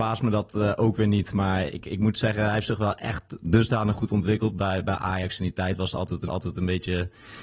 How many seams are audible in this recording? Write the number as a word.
one